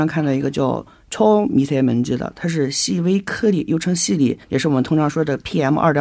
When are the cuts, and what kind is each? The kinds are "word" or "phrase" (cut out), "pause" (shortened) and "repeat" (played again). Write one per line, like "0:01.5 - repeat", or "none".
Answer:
0:04.4 - pause

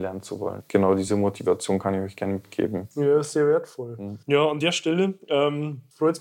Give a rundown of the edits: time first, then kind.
none

